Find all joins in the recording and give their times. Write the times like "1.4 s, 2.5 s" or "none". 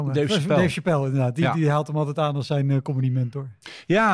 none